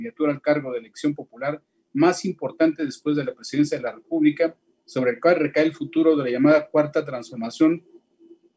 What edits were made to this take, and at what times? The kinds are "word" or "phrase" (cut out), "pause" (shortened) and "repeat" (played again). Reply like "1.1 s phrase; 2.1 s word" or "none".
none